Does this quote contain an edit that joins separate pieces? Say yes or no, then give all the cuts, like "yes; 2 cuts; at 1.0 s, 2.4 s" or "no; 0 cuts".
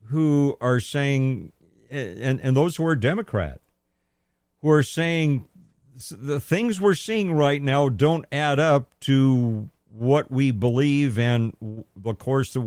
no; 0 cuts